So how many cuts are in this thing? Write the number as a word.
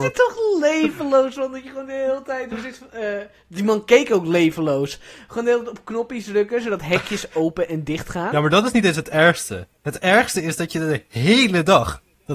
one